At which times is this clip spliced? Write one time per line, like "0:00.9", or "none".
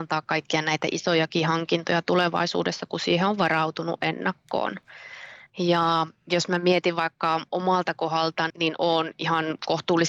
0:08.5

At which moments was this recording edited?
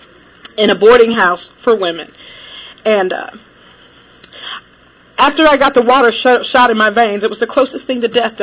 none

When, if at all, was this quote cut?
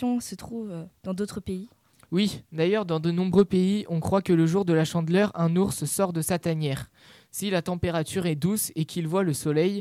none

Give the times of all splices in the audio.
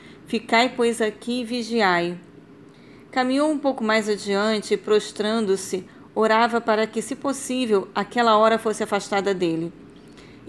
none

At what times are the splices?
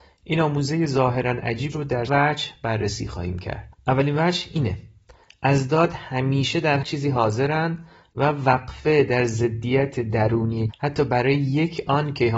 0:01.7
0:02.1
0:06.8
0:10.7

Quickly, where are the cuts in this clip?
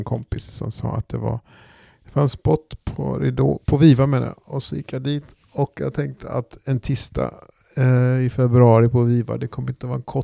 none

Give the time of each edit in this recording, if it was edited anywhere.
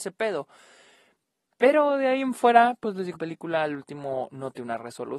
0:03.1

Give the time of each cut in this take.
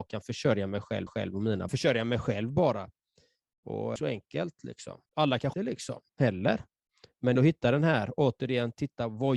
0:01.1
0:01.7
0:04.0
0:05.1
0:05.5
0:06.1
0:07.4

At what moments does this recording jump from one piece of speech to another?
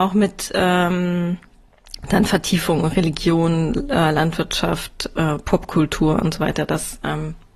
none

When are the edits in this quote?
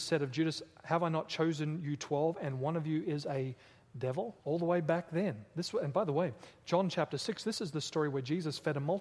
0:04.4

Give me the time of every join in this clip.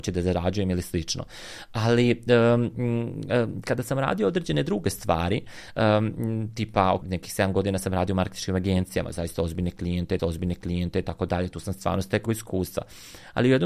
0:07.0
0:10.2
0:12.3

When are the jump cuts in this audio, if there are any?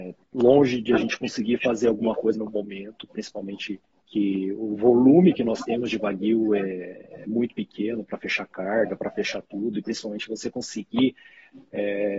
0:02.3
0:03.9

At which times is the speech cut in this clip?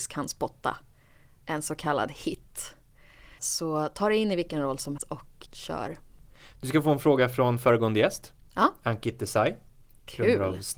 0:03.4
0:05.0
0:05.5

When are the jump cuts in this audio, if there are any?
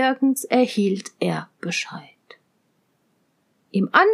none

